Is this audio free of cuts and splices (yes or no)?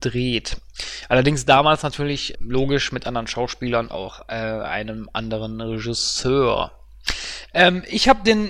no